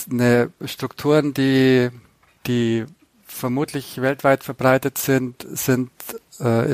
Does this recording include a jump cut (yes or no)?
no